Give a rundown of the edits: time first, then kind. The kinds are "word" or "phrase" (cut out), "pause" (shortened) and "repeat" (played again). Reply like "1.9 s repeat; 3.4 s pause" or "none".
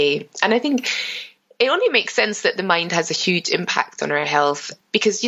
none